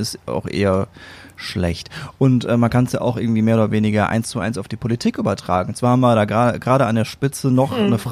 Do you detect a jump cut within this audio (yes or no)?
no